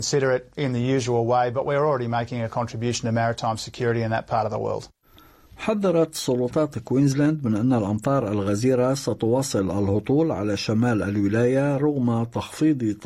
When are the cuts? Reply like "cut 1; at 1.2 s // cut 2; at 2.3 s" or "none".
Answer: none